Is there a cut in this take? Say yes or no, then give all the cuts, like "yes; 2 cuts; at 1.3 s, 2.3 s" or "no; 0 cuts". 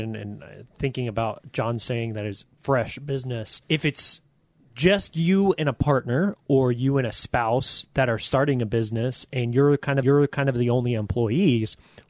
yes; 3 cuts; at 2.6 s, 3.6 s, 10.0 s